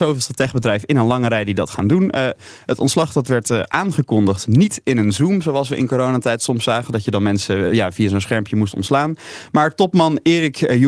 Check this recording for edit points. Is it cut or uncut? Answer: uncut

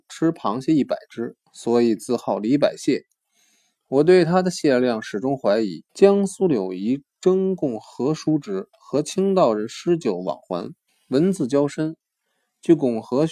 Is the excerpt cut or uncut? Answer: cut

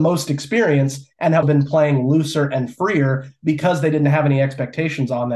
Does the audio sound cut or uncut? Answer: cut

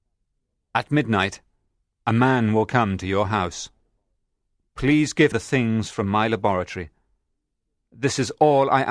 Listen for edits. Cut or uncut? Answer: cut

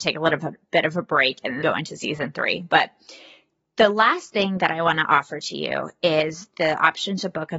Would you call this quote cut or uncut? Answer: cut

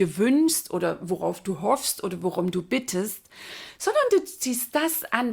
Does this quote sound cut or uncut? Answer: uncut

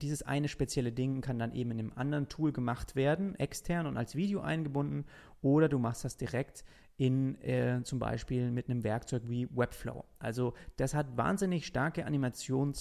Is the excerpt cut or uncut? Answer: uncut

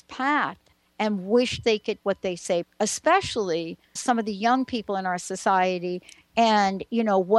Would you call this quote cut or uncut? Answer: cut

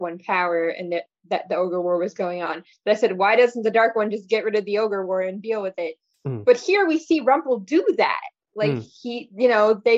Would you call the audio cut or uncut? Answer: uncut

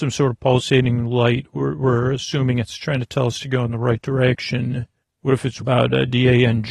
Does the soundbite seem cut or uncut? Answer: cut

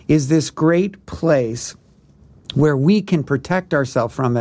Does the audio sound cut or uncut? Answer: uncut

